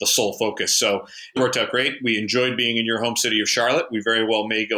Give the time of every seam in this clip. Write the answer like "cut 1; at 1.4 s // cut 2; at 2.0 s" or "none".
cut 1; at 1.4 s